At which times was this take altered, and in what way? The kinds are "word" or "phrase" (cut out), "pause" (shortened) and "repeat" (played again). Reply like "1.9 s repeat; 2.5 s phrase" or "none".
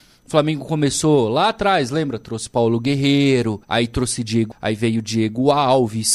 3.6 s pause; 4.5 s word